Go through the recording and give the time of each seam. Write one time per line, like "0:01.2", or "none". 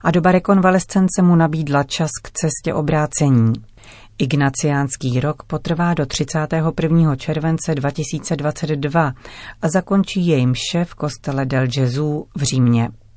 none